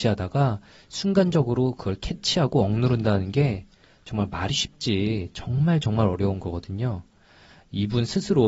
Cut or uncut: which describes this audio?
uncut